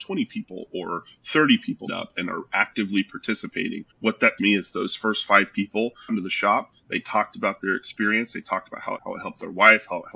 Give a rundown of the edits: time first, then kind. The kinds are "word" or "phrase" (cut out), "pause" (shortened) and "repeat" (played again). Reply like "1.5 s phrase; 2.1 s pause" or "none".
1.9 s word; 3.9 s pause; 4.4 s word; 6.1 s phrase; 6.8 s pause; 9.0 s phrase